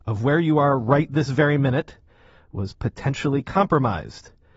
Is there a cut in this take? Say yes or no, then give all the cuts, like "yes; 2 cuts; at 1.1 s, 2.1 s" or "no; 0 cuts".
no; 0 cuts